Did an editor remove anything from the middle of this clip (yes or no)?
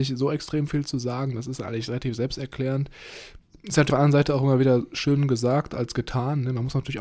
yes